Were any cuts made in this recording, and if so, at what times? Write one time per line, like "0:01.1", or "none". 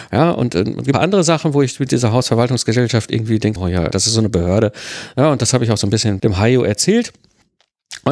0:00.9
0:03.6
0:03.9
0:06.2